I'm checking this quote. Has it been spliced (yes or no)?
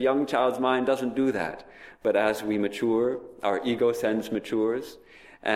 no